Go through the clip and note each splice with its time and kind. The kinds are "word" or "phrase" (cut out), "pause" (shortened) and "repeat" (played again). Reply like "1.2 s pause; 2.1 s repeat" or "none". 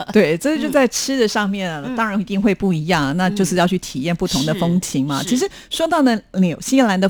1.9 s phrase